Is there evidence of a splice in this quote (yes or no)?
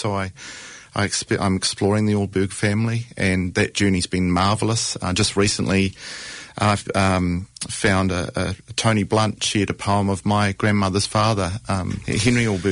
no